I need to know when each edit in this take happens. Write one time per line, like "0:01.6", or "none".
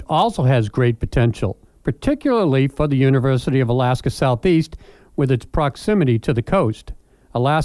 none